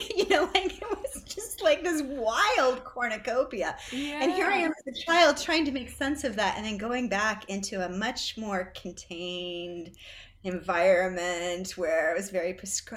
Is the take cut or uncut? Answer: uncut